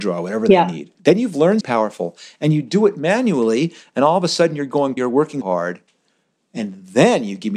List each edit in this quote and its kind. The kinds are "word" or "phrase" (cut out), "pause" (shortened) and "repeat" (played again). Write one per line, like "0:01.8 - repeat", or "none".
0:01.0 - pause
0:01.6 - phrase
0:05.0 - word
0:05.4 - word